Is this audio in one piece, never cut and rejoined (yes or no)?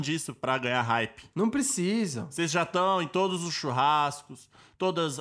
yes